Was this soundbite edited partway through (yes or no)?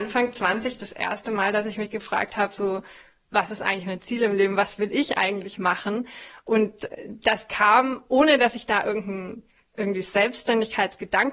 no